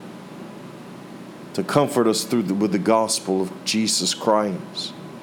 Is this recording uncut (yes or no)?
yes